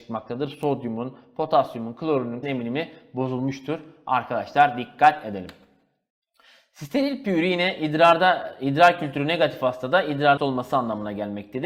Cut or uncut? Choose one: cut